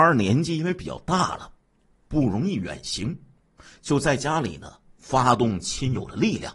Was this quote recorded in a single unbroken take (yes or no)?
yes